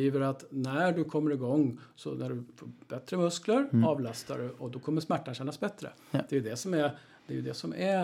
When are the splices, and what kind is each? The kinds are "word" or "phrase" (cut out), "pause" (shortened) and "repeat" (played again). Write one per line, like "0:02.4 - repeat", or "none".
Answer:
none